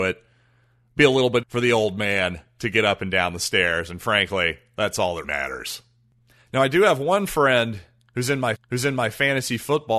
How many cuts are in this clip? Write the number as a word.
three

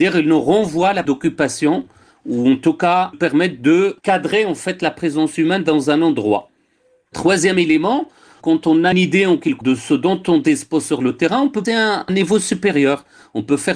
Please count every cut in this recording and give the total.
six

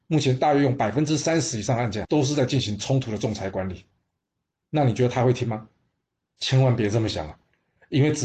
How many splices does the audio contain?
one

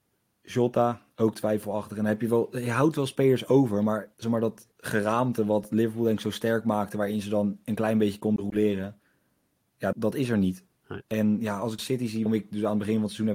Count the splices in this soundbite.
six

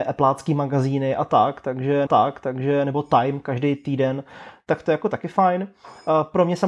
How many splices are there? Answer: one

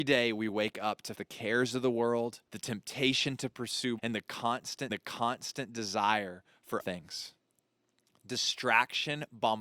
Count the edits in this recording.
five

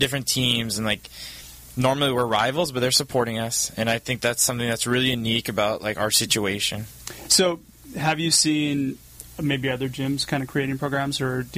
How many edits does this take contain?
zero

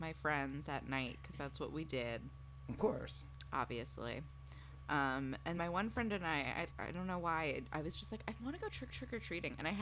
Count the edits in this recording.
three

